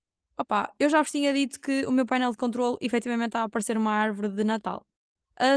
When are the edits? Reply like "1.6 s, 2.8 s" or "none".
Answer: none